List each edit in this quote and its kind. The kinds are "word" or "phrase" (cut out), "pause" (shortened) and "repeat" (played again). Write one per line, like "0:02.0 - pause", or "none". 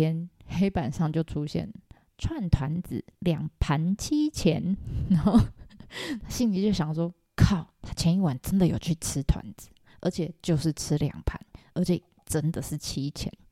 none